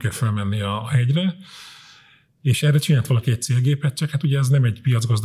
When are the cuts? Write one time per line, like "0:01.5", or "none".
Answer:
none